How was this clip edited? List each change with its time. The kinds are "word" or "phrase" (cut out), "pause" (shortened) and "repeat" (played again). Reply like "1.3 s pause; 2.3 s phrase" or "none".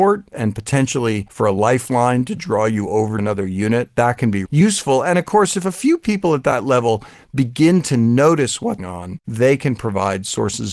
3.2 s word; 4.5 s word; 8.8 s word